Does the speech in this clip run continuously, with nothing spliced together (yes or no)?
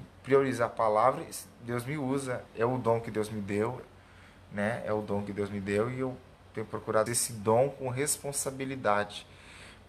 no